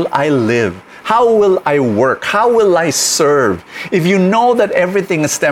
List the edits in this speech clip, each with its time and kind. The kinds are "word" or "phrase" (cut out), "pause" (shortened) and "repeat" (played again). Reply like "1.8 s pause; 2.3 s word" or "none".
none